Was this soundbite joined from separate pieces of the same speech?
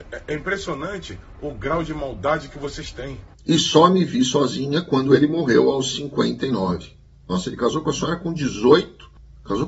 no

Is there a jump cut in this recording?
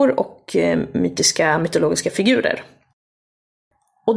no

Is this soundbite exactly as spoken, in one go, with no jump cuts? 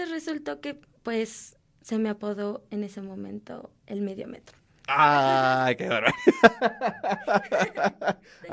yes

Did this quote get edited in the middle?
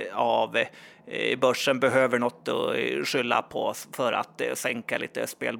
no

